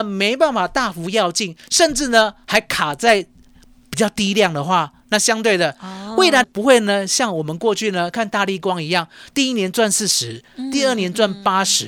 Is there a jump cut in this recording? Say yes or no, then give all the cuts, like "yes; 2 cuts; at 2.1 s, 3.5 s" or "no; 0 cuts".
yes; 1 cut; at 6.4 s